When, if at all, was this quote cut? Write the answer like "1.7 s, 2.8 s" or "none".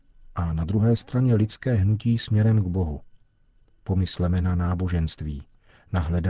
none

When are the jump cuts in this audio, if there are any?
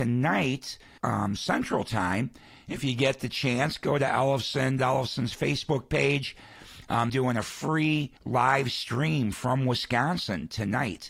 1.0 s, 4.8 s, 7.1 s, 8.2 s

